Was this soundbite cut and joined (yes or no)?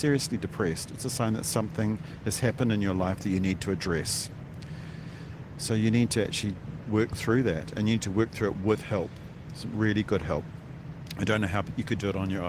no